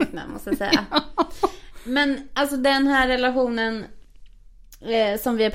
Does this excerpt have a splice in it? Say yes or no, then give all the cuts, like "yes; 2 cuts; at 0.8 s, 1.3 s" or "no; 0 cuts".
no; 0 cuts